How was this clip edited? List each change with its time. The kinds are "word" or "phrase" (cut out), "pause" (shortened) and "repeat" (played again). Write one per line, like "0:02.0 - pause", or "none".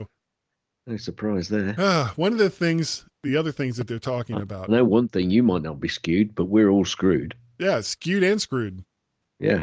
none